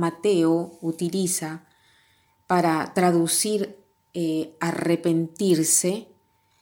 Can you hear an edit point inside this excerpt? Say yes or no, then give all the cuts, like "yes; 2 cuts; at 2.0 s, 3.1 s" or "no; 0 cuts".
no; 0 cuts